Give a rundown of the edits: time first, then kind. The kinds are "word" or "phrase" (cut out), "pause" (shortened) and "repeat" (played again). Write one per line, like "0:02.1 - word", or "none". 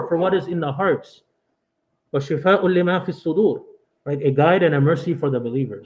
none